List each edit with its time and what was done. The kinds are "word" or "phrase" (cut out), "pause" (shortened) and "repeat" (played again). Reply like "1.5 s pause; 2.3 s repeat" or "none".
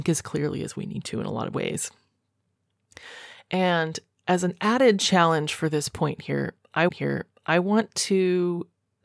4.2 s pause; 6.9 s repeat